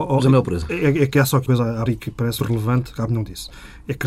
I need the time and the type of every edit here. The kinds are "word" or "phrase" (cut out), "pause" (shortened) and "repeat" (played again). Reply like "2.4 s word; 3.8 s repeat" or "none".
1.5 s word; 1.9 s word; 2.4 s word; 3.1 s word